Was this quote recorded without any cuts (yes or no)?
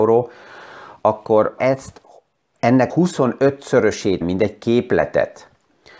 no